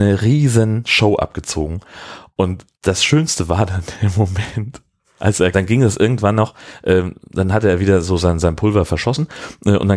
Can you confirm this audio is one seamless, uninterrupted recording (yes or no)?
no